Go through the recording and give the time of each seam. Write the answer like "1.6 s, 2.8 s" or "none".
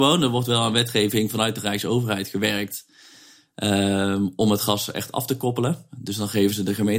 none